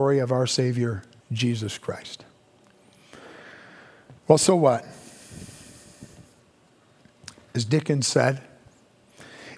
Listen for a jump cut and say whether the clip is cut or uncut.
cut